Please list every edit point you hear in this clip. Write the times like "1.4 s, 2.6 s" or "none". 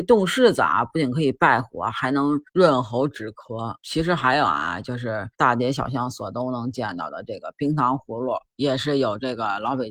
2.5 s, 3.8 s, 5.3 s, 8.5 s